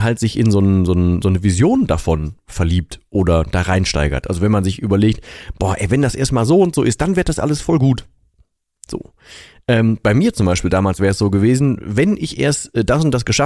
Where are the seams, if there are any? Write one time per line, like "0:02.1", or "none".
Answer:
none